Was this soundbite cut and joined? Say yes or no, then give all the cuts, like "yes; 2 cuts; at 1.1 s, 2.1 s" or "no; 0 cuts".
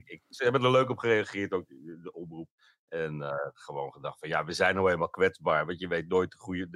no; 0 cuts